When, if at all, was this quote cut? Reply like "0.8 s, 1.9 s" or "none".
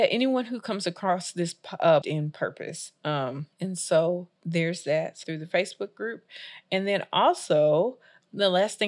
2.0 s, 3.5 s, 4.4 s, 5.2 s